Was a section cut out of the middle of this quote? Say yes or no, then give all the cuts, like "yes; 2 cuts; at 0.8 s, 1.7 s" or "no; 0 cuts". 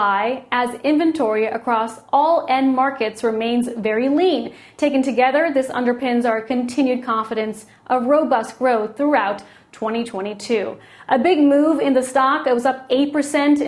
no; 0 cuts